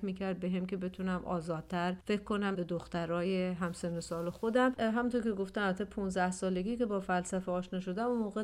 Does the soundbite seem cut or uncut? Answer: cut